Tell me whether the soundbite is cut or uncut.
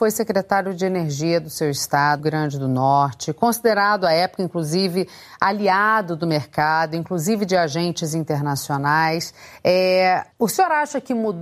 cut